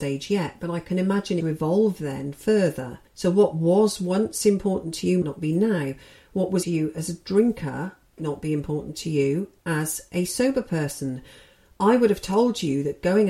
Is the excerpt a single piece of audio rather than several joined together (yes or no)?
no